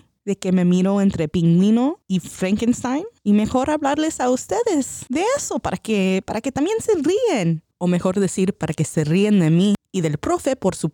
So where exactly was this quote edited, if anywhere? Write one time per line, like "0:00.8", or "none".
0:03.2
0:07.7